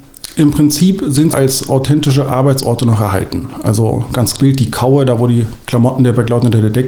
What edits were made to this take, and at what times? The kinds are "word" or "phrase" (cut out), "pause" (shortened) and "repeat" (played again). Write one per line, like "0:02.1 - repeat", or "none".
0:01.3 - word
0:04.4 - word